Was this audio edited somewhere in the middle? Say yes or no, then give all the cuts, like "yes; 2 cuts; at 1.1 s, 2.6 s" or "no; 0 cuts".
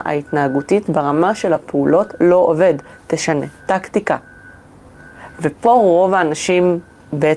no; 0 cuts